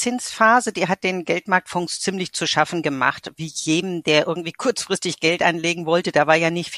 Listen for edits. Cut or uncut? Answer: uncut